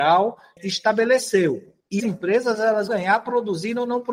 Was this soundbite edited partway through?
yes; 2 cuts; at 2.0 s, 2.9 s

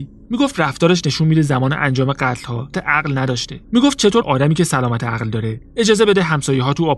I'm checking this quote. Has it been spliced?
yes; 3 cuts; at 2.7 s, 3.6 s, 4.2 s

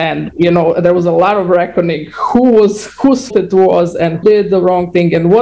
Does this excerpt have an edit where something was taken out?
yes; 2 cuts; at 3.3 s, 4.2 s

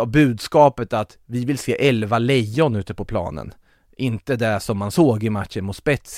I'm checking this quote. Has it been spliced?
no; 0 cuts

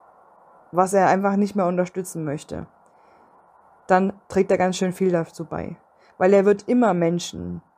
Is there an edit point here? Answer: no; 0 cuts

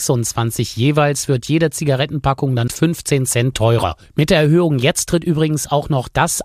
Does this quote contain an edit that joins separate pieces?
yes; 1 cut; at 2.7 s

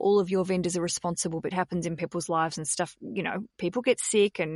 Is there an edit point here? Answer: yes; 1 cut; at 1.5 s

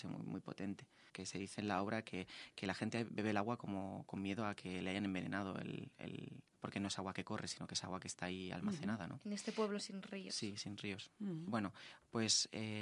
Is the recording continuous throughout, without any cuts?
no; 2 cuts; at 1.1 s, 6.5 s

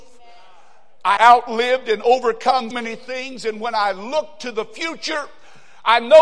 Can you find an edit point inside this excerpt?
yes; 2 cuts; at 1.2 s, 2.7 s

